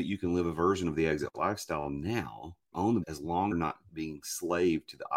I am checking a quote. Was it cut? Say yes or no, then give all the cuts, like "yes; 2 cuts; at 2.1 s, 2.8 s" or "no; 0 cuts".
yes; 3 cuts; at 2.7 s, 3.0 s, 3.5 s